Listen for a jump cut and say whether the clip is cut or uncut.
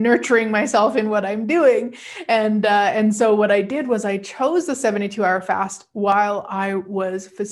uncut